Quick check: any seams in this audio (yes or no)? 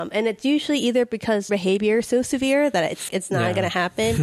yes